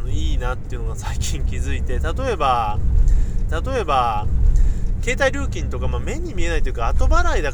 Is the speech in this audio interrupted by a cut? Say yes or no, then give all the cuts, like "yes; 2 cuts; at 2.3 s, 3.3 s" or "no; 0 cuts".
yes; 1 cut; at 3.5 s